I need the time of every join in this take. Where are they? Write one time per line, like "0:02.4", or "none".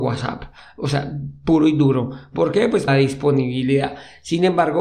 0:02.9